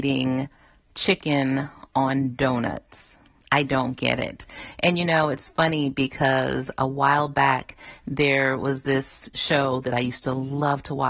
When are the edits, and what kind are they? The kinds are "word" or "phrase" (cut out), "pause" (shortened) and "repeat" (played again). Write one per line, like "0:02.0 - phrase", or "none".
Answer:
0:03.4 - pause